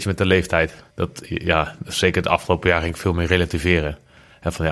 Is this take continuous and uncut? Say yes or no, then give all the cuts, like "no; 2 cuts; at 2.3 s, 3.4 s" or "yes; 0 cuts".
no; 1 cut; at 0.9 s